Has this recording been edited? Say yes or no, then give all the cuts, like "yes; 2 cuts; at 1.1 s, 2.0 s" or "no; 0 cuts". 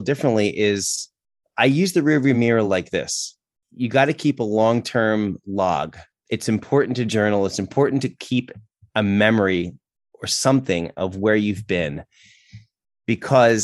no; 0 cuts